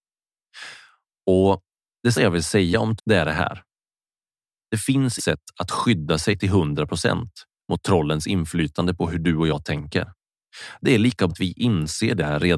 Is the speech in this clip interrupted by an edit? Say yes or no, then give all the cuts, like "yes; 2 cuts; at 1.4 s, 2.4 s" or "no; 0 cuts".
yes; 4 cuts; at 2.1 s, 3.0 s, 5.2 s, 11.3 s